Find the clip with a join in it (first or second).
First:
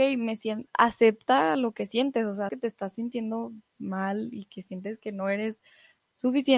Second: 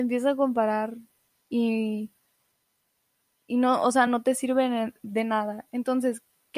first